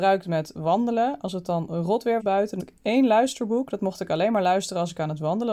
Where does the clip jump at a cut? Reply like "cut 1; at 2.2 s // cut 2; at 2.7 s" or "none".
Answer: cut 1; at 2.2 s // cut 2; at 2.6 s

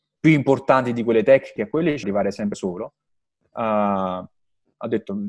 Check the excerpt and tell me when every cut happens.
cut 1; at 1.6 s // cut 2; at 2.0 s // cut 3; at 2.5 s

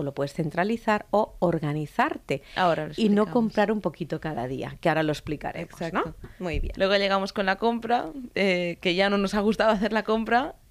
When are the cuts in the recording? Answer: none

